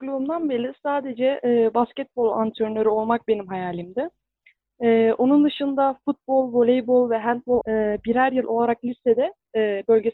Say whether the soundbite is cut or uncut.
cut